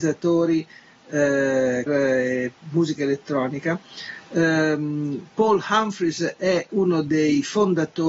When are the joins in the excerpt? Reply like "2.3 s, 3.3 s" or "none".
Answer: 1.9 s, 6.7 s